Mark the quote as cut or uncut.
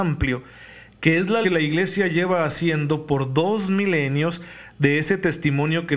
cut